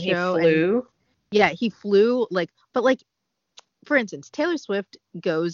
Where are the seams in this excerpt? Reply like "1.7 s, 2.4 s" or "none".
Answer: none